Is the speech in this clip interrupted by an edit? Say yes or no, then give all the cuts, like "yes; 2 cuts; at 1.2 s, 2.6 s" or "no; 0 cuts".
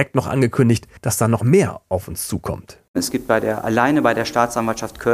yes; 1 cut; at 1.0 s